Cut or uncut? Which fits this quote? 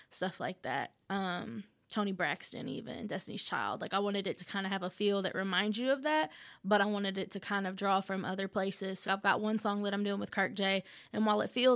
cut